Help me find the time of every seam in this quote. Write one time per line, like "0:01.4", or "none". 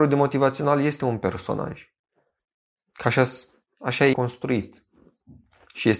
0:04.1